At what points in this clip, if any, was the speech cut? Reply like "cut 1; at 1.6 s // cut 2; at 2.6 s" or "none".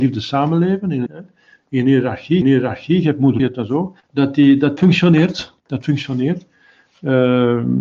cut 1; at 1.1 s // cut 2; at 2.4 s // cut 3; at 3.4 s // cut 4; at 4.0 s // cut 5; at 4.8 s // cut 6; at 5.6 s